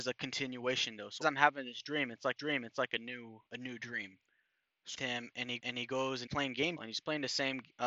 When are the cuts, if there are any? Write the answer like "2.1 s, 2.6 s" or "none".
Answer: 1.2 s, 2.4 s, 3.5 s, 4.9 s, 5.6 s, 6.3 s, 6.8 s